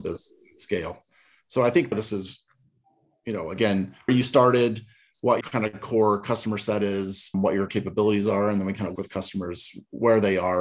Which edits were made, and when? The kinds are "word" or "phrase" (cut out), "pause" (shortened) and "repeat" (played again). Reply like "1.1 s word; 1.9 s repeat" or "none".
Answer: 1.9 s word; 4.1 s word; 5.4 s word; 7.3 s word; 7.7 s word; 9.0 s word